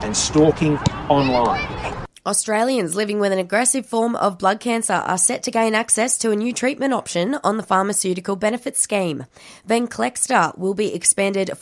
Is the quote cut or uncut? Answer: uncut